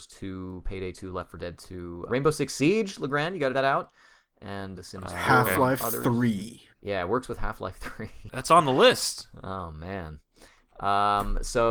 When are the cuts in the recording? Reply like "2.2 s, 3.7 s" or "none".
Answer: 2.1 s, 3.5 s, 4.8 s, 6.7 s